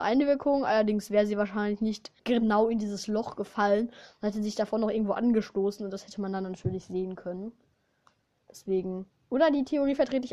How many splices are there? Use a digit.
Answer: 2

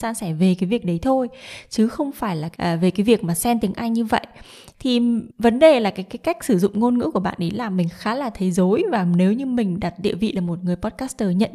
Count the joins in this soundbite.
1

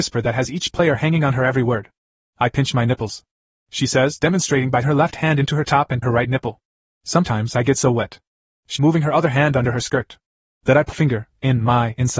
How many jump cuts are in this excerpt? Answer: 4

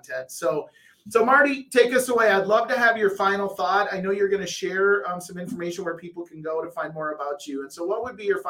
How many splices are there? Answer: 0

